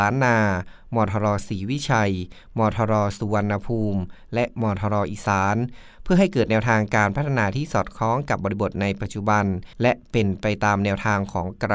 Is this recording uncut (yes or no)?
no